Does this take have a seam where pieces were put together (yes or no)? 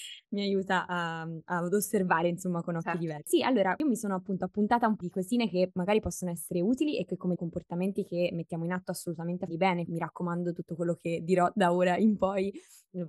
yes